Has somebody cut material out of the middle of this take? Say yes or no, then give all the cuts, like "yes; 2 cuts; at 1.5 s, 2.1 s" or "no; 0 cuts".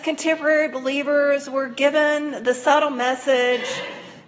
no; 0 cuts